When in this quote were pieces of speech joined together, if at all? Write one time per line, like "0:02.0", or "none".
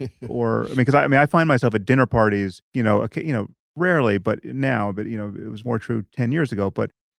0:02.6
0:03.6

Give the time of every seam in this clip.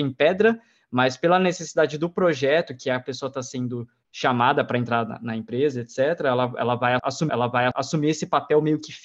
0:07.3

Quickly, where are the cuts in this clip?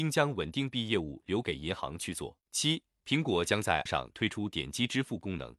0:02.4
0:03.9

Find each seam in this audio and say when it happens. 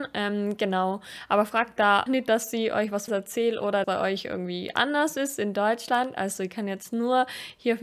0:02.1
0:03.1
0:03.8

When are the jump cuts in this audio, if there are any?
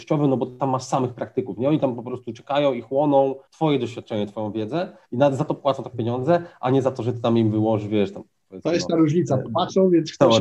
0:03.5
0:05.0
0:05.9

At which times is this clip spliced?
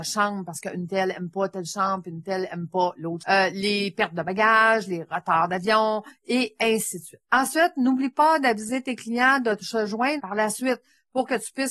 0:03.2
0:07.2
0:10.2

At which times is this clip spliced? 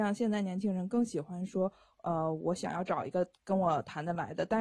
none

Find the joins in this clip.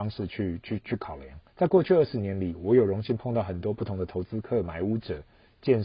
0:01.5

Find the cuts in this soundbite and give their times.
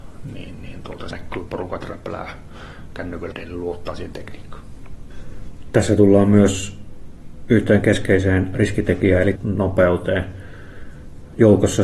0:01.1
0:01.5
0:03.3
0:09.4

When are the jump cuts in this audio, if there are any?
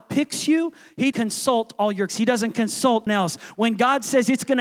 0:01.1
0:02.1
0:03.1

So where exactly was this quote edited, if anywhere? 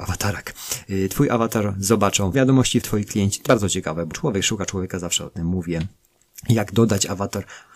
0:02.3
0:02.8
0:03.5
0:04.1

